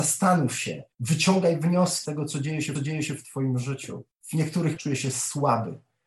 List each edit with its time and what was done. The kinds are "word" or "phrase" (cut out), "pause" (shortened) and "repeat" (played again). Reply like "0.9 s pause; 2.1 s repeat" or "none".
0.9 s pause; 2.0 s word; 2.7 s repeat; 4.1 s pause; 4.8 s word